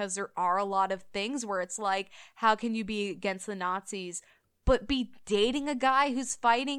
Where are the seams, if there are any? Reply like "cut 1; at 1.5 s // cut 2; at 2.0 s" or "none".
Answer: none